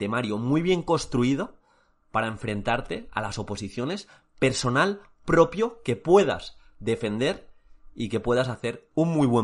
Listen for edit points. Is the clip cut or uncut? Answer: uncut